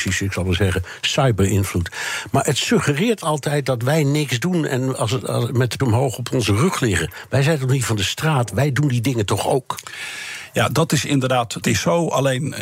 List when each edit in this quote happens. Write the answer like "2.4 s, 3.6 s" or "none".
5.8 s, 11.6 s